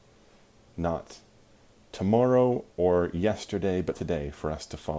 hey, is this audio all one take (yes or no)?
no